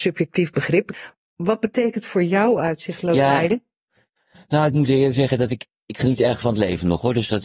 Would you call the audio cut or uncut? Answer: cut